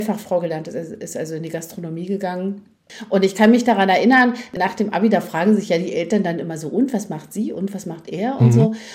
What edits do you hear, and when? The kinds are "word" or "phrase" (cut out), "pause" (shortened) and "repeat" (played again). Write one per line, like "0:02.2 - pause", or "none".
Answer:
none